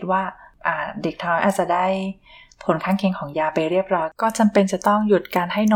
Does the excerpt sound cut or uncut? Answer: uncut